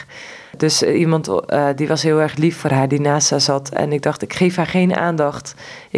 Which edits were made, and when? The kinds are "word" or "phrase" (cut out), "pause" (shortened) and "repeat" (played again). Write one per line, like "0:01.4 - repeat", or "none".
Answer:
none